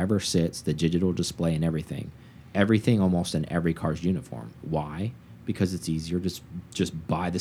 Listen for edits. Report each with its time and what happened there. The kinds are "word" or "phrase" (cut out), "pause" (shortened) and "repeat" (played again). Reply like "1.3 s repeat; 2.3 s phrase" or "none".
none